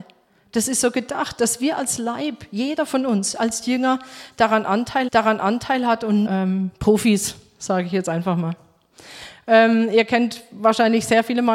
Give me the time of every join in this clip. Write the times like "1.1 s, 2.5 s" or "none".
5.1 s, 6.3 s